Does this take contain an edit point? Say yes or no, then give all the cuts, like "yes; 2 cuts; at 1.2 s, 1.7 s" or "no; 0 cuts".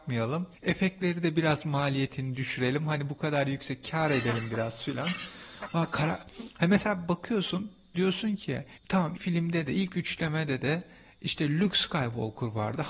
yes; 1 cut; at 9.2 s